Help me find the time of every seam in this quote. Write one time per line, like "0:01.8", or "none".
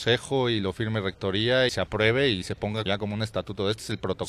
0:01.7
0:02.9